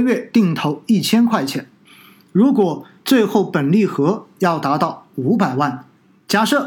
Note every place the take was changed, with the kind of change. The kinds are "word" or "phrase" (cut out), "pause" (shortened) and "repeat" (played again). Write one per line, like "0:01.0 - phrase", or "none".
none